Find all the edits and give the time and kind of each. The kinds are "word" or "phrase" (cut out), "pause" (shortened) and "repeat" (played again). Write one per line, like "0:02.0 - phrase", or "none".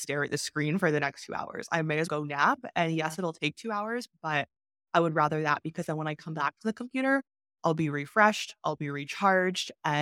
0:02.1 - word